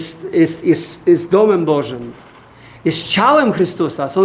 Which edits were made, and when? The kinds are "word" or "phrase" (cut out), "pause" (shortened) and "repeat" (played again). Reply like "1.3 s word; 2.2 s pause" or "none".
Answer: none